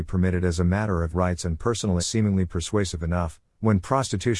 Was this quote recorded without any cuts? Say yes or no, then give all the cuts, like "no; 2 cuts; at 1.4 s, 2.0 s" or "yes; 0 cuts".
no; 2 cuts; at 1.1 s, 2.0 s